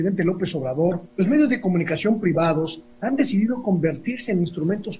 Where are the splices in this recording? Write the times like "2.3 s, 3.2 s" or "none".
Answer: 1.1 s